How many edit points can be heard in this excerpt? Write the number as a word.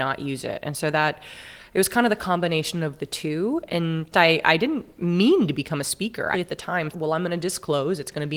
four